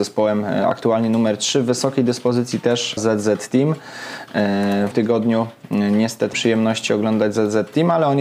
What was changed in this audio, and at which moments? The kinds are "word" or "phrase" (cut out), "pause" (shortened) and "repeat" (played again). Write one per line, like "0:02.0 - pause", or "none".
0:03.0 - word
0:04.9 - word
0:06.3 - phrase